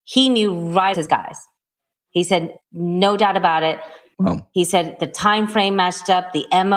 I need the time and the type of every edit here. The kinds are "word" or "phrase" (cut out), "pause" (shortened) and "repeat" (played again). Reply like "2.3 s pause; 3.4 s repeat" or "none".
0.9 s phrase